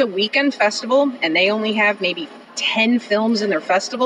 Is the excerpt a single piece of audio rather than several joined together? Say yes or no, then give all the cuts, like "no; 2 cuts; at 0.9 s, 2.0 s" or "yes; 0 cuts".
no; 1 cut; at 2.4 s